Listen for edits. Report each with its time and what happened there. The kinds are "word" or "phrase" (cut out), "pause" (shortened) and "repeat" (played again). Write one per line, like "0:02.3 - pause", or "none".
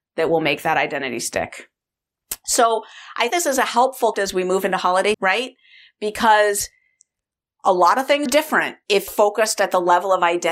0:03.3 - word
0:04.1 - word
0:05.1 - word
0:08.3 - word
0:09.1 - word